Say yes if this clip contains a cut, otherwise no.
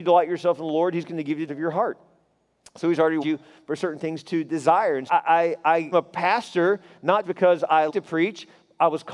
yes